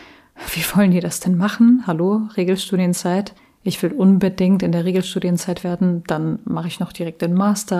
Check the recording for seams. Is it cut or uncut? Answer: cut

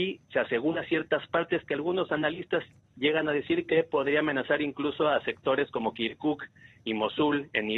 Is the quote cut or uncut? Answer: uncut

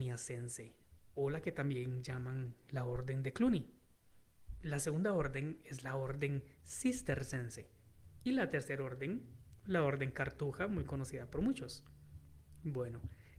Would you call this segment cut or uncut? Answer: uncut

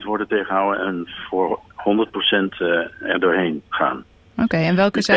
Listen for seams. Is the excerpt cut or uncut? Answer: cut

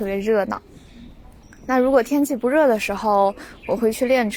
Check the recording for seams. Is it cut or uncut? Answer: cut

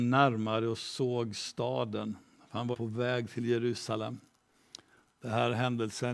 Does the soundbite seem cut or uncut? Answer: cut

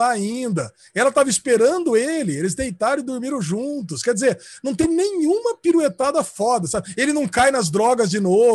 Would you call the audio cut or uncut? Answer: uncut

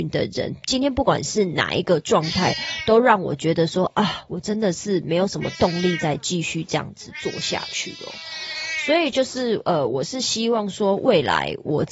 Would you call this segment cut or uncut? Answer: uncut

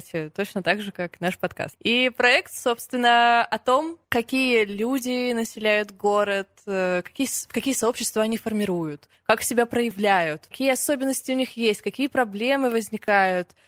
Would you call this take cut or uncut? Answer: uncut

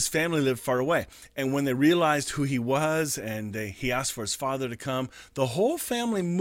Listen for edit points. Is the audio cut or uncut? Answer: uncut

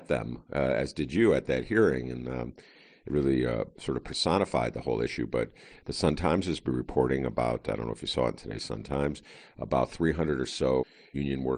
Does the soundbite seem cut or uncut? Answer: uncut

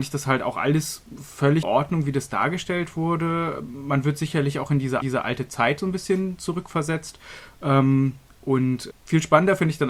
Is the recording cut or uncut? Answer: cut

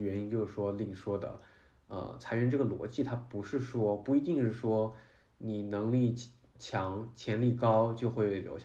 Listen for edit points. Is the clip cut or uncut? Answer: uncut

